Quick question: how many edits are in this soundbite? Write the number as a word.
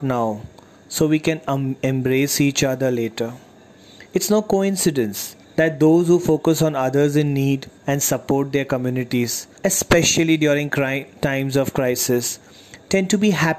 four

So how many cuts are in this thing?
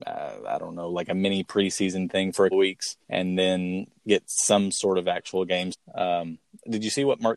three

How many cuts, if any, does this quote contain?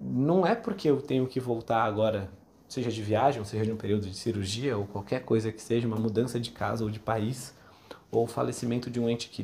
zero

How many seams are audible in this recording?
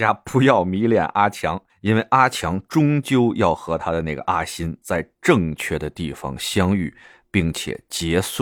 one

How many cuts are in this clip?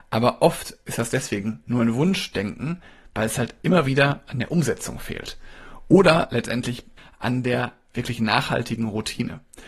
zero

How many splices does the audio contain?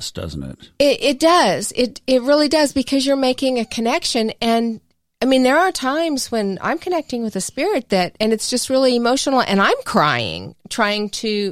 zero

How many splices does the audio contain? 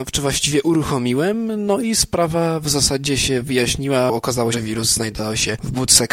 one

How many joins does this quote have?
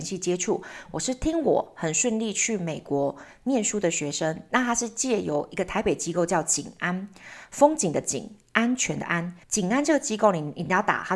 one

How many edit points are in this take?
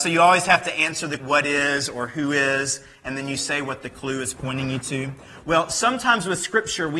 one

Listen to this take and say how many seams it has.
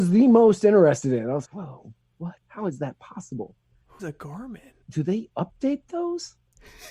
four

